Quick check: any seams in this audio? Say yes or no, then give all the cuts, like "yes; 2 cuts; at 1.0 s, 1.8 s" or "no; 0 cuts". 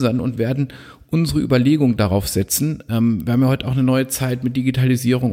no; 0 cuts